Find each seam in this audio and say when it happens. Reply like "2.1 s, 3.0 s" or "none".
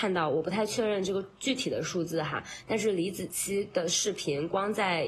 none